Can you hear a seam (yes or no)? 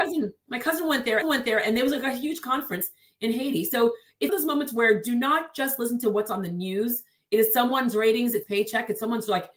yes